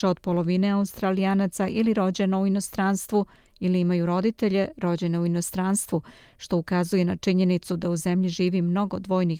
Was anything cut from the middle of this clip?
no; 0 cuts

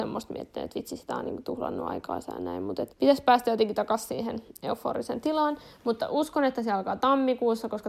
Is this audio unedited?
no; 1 cut; at 2.9 s

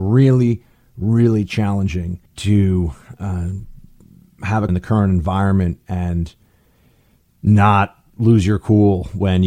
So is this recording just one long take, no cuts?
no; 2 cuts; at 2.3 s, 4.7 s

